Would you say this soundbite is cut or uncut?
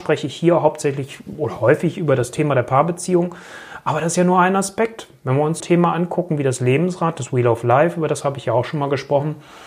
cut